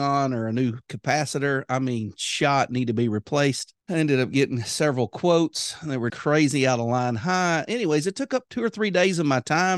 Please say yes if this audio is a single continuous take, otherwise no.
no